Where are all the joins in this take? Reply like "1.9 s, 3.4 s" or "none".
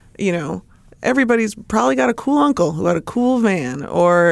none